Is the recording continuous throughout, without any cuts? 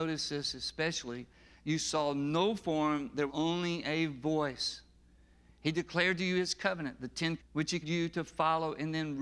no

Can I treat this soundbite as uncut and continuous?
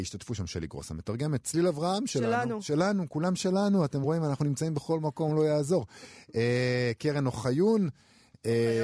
yes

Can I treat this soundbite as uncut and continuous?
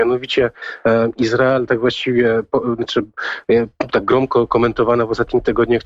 yes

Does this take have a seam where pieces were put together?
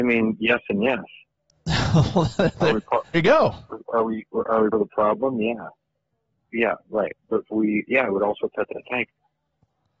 yes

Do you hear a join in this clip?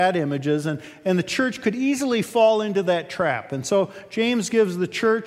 no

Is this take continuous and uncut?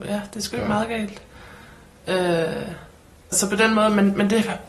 no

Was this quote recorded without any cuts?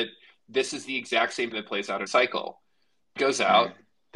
no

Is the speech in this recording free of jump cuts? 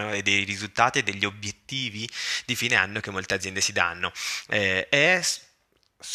yes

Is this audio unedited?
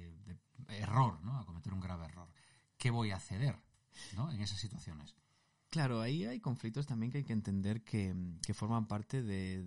yes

